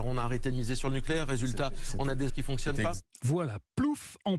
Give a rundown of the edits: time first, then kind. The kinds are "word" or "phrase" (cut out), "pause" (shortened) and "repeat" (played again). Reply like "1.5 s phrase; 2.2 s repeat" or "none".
2.3 s word